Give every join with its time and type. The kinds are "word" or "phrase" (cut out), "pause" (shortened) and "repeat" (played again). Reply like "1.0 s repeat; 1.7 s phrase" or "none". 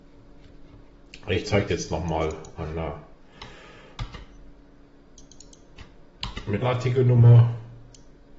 1.7 s word; 6.6 s phrase